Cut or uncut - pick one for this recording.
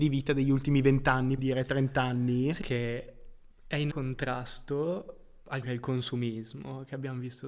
cut